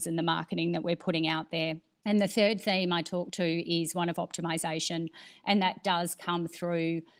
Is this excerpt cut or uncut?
uncut